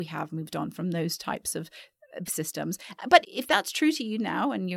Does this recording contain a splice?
yes; 2 cuts; at 2.3 s, 3.2 s

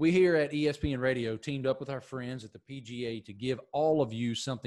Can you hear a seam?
no; 0 cuts

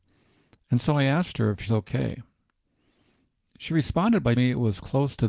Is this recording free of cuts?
no; 2 cuts; at 1.7 s, 4.4 s

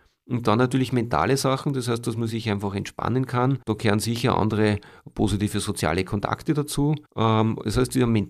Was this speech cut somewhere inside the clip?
yes; 2 cuts; at 3.6 s, 7.1 s

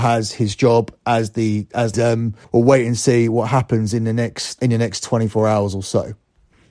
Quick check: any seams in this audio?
yes; 3 cuts; at 1.9 s, 2.4 s, 4.6 s

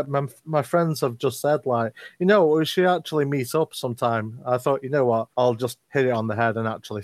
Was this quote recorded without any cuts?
no; 1 cut; at 5.3 s

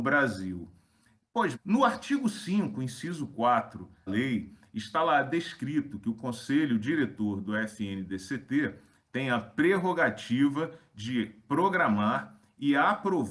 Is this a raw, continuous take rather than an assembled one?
no; 2 cuts; at 1.5 s, 4.1 s

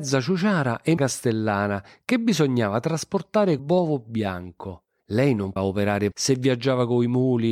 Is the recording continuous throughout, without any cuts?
no; 5 cuts; at 1.0 s, 3.6 s, 5.0 s, 5.6 s, 6.1 s

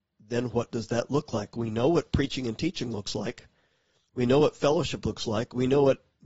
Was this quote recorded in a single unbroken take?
yes; 0 cuts

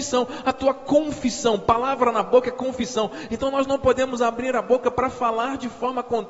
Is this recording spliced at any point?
no; 0 cuts

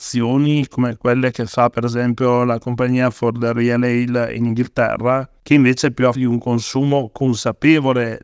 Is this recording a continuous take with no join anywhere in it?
no; 1 cut; at 6.1 s

